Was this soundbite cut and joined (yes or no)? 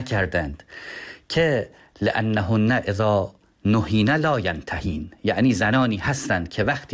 no